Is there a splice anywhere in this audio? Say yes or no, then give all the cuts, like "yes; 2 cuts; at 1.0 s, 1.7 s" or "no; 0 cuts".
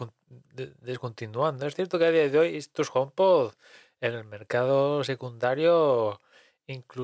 no; 0 cuts